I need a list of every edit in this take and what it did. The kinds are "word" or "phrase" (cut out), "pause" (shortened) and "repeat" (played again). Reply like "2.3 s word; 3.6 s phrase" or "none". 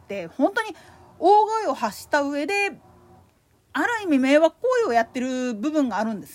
none